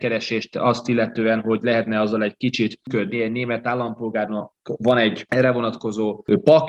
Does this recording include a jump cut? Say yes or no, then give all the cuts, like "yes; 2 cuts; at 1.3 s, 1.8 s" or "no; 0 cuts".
no; 0 cuts